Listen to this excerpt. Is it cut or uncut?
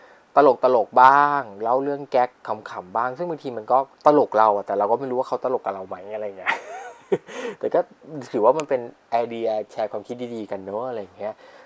cut